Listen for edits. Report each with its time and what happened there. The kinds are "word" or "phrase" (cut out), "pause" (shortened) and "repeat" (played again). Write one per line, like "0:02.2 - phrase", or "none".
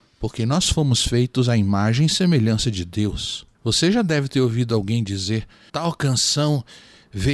0:03.5 - pause
0:05.7 - word